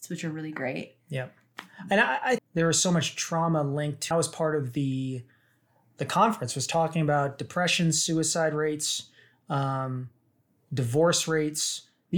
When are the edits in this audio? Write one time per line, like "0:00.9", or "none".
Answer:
0:02.4
0:04.1